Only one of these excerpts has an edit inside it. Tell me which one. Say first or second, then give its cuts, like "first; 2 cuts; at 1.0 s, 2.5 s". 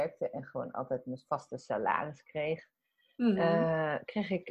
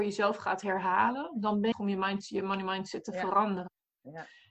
second; 1 cut; at 1.7 s